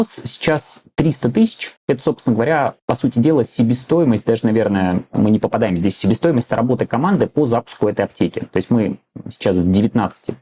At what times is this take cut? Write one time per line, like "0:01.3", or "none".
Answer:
0:01.8
0:02.8